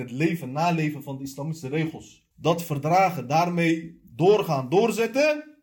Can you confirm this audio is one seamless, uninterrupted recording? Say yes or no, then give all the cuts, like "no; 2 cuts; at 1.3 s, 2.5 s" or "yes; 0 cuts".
no; 1 cut; at 2.3 s